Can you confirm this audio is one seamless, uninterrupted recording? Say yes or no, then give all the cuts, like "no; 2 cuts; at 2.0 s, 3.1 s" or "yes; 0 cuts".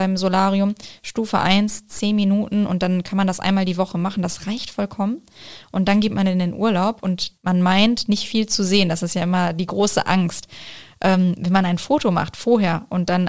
no; 1 cut; at 7.4 s